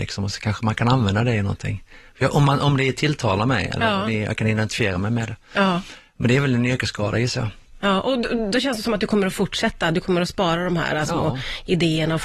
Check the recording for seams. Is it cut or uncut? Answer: uncut